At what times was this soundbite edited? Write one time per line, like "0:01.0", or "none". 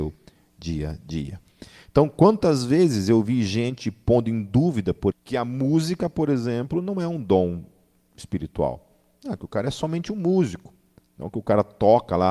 0:05.1